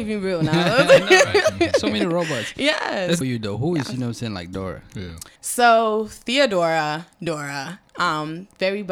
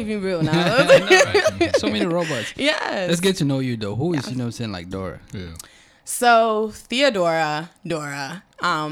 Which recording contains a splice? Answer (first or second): first